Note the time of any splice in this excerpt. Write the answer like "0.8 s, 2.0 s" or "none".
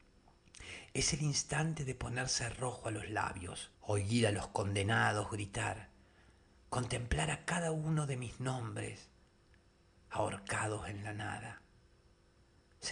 3.7 s